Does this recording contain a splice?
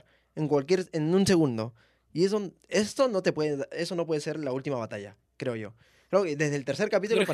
no; 0 cuts

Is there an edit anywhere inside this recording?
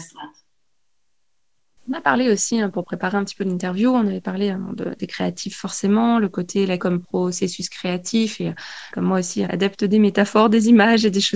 yes; 4 cuts; at 5.0 s, 6.8 s, 8.9 s, 9.5 s

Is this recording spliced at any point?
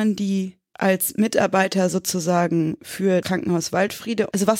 yes; 1 cut; at 3.2 s

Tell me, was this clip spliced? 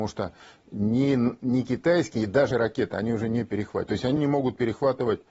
yes; 2 cuts; at 2.5 s, 4.2 s

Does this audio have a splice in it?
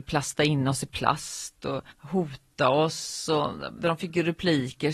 yes; 2 cuts; at 1.9 s, 3.8 s

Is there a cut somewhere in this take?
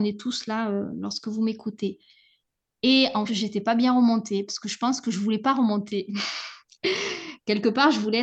yes; 1 cut; at 3.3 s

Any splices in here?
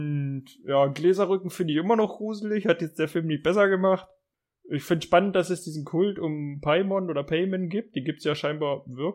no; 0 cuts

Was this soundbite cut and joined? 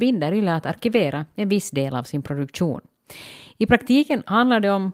no; 0 cuts

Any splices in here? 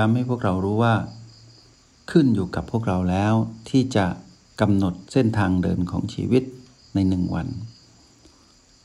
no; 0 cuts

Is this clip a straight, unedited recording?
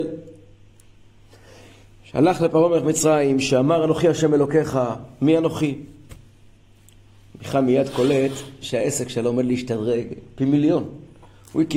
yes; 0 cuts

